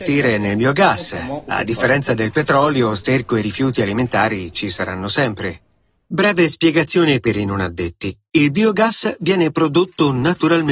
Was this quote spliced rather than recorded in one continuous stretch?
no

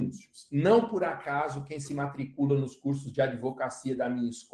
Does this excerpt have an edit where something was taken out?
no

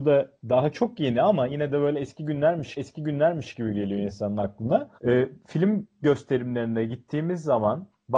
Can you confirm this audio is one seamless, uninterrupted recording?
no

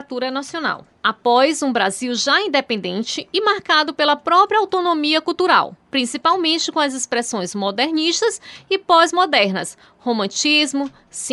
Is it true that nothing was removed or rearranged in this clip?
no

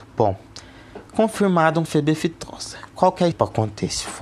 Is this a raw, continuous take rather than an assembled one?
no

